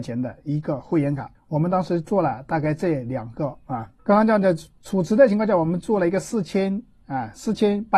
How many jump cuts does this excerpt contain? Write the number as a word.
two